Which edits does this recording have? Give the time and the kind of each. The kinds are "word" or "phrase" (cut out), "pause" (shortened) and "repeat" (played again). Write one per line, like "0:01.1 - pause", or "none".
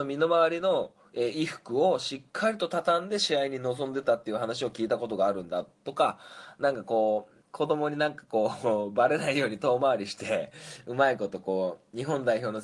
0:07.4 - pause